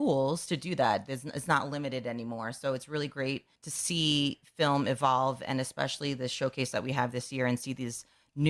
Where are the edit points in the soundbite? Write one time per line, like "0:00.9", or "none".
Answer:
0:03.5

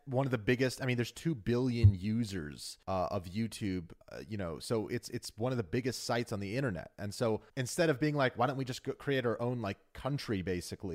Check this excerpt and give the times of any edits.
0:02.8
0:04.0
0:07.5

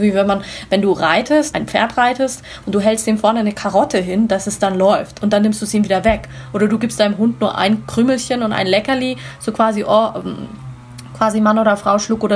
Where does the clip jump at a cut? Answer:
0:01.5

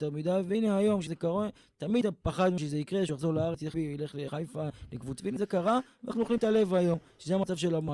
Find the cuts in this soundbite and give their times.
0:03.7
0:05.2

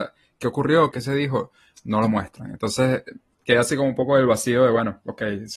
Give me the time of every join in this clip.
0:00.9

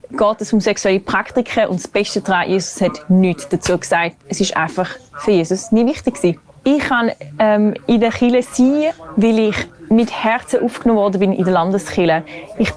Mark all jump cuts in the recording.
none

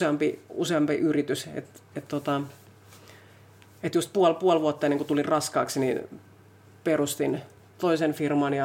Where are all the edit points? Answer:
none

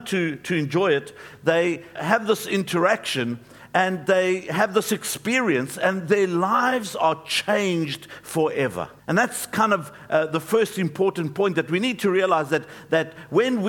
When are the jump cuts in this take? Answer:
0:02.0
0:09.0

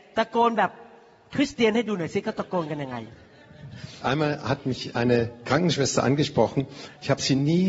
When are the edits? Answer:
0:04.0

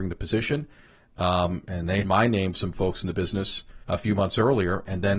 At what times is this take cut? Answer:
0:02.0
0:02.5
0:03.8

